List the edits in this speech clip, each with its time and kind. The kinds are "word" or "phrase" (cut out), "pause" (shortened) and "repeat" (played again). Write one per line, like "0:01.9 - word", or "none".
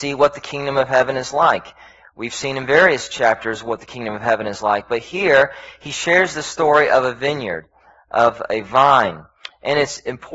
none